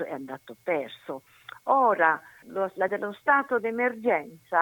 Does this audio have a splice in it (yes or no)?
yes